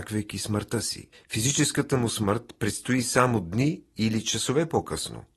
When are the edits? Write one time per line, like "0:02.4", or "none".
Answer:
0:01.1